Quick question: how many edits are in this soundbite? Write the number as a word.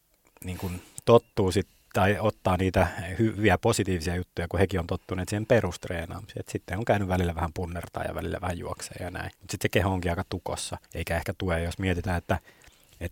two